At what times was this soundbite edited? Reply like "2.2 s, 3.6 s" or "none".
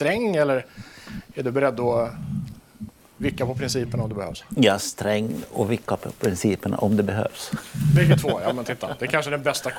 none